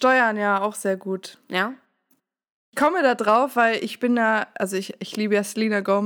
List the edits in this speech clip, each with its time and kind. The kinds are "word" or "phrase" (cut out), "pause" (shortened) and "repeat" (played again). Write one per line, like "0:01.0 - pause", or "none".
none